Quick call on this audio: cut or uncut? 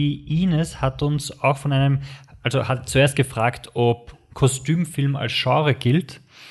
uncut